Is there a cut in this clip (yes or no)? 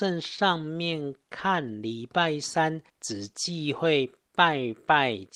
yes